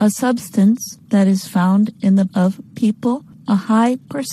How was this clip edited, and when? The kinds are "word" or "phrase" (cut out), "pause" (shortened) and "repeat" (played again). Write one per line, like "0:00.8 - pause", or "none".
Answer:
0:02.3 - word